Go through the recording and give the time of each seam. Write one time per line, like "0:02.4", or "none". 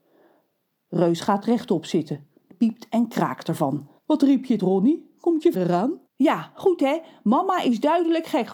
0:02.5
0:04.0
0:04.6
0:05.5
0:06.1